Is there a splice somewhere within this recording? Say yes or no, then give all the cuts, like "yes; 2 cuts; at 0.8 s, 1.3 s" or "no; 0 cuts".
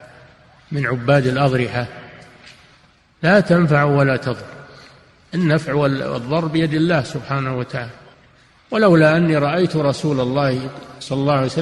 no; 0 cuts